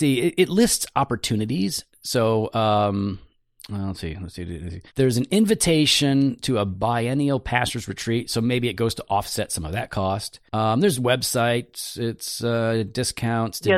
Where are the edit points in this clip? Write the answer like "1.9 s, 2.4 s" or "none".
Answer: 4.9 s, 10.5 s